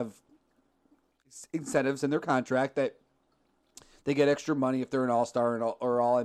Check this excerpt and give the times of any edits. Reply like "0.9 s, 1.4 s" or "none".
none